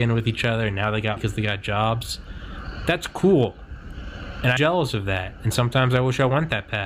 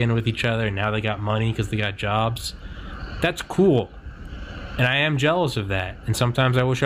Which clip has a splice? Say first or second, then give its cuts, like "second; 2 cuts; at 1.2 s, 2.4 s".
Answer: first; 2 cuts; at 1.2 s, 4.6 s